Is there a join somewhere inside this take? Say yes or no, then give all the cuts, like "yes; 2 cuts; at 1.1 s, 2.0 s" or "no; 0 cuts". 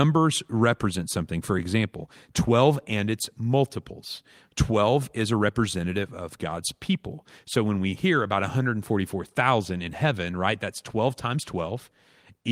no; 0 cuts